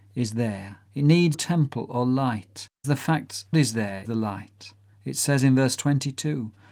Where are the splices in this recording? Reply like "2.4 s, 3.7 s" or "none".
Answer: 1.3 s, 2.8 s, 3.5 s, 4.0 s